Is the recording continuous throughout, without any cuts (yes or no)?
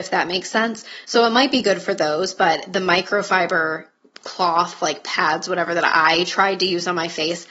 yes